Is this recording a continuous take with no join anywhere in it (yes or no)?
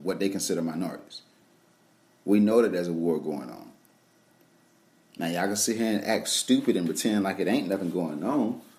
yes